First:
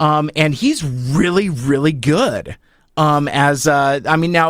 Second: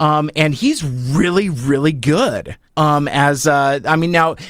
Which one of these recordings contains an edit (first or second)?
second